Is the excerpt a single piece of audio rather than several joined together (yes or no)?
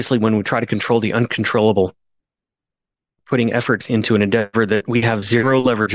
yes